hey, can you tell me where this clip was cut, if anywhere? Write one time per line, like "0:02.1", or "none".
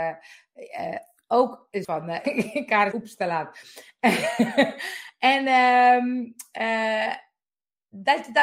0:01.8
0:02.2
0:02.9